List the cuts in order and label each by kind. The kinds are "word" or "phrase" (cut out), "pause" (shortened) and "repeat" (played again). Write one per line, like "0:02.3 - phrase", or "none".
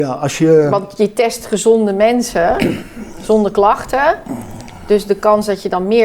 none